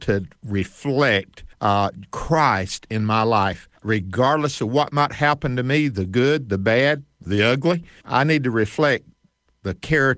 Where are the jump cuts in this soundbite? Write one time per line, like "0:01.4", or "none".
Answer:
0:01.5
0:03.8
0:08.0